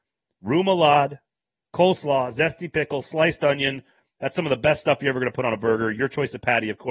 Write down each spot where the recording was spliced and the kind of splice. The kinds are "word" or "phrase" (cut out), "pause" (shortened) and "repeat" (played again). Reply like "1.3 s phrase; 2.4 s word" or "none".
none